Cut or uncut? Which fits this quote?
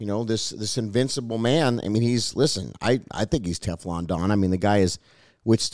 uncut